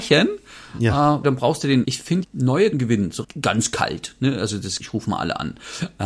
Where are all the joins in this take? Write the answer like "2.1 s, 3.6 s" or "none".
1.2 s, 1.8 s, 2.2 s, 2.7 s, 3.2 s, 4.8 s